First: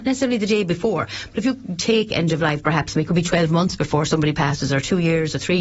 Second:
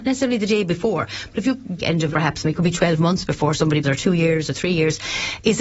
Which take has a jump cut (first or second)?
second